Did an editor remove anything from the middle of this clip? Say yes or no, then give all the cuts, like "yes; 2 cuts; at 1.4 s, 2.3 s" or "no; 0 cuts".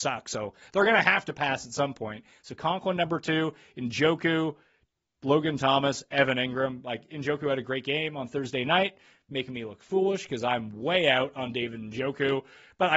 no; 0 cuts